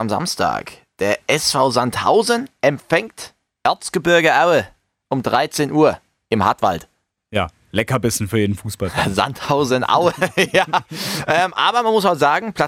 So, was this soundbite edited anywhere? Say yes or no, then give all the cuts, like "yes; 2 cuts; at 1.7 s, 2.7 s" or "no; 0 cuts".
no; 0 cuts